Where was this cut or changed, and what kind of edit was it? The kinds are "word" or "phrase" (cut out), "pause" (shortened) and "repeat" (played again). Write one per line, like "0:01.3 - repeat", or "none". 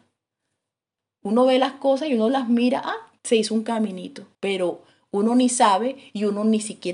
0:03.2 - pause
0:04.3 - pause